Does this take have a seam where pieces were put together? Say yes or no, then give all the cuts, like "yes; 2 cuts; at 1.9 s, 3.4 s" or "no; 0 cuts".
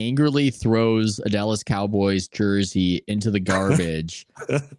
no; 0 cuts